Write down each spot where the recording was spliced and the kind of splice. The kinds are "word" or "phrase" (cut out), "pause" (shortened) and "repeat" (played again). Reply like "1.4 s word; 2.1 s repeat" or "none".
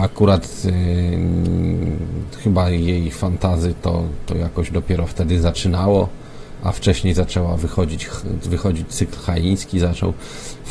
none